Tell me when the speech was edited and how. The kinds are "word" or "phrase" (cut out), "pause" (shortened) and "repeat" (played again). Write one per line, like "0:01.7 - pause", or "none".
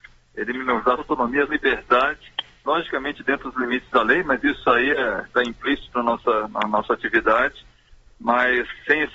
0:01.0 - word
0:01.5 - word